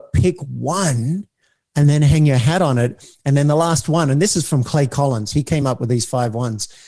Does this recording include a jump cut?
no; 0 cuts

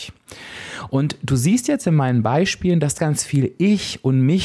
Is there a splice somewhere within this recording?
yes; 1 cut; at 3.0 s

